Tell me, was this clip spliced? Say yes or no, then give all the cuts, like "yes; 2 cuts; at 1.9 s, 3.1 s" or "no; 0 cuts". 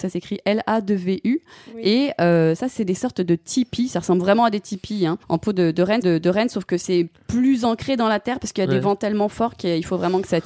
yes; 2 cuts; at 5.2 s, 6.0 s